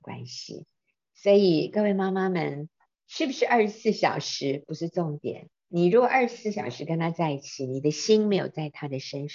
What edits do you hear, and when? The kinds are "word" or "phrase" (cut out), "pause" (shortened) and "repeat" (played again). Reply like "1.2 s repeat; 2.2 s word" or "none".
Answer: 5.5 s pause